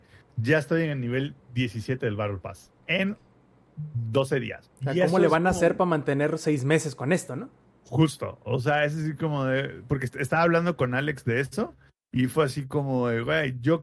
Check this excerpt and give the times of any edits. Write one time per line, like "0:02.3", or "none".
0:02.8
0:04.7
0:07.6